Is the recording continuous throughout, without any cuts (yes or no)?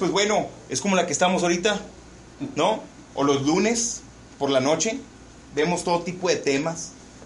yes